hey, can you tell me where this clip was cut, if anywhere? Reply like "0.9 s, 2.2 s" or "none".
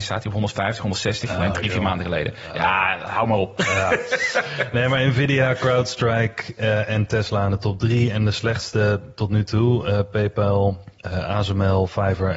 11.0 s